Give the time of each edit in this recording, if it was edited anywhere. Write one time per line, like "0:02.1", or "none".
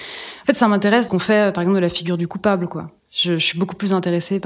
0:01.1